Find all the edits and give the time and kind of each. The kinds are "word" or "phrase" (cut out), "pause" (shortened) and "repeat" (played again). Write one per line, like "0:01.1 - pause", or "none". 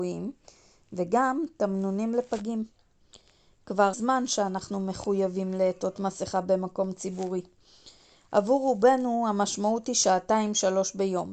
0:03.9 - word